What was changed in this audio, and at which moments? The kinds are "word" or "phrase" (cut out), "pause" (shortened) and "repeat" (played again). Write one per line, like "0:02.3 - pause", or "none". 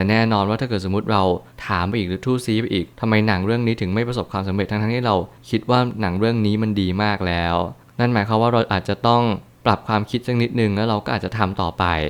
0:02.9 - pause